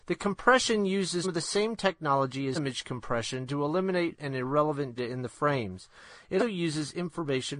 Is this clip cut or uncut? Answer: cut